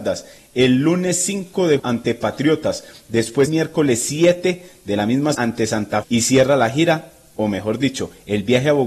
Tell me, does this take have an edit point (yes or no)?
yes